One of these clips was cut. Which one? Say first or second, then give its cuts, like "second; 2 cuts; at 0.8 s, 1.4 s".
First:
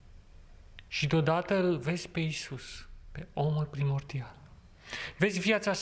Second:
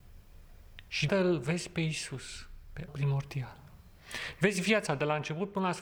second; 3 cuts; at 1.1 s, 2.9 s, 4.9 s